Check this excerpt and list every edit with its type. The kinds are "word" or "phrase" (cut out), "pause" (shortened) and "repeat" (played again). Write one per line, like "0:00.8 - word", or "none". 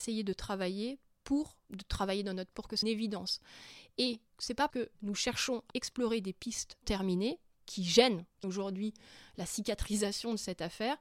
0:01.6 - pause
0:02.5 - word
0:02.8 - phrase
0:04.3 - pause
0:04.7 - word
0:05.7 - word
0:06.8 - word
0:08.4 - word